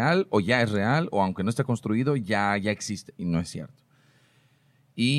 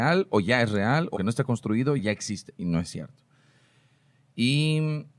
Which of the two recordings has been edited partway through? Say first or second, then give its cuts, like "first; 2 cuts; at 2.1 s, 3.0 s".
second; 2 cuts; at 1.2 s, 2.0 s